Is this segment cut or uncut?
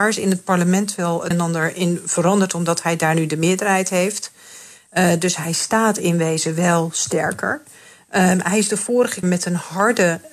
cut